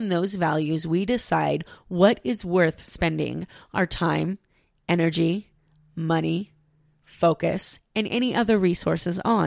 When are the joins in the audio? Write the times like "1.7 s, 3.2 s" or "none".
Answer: none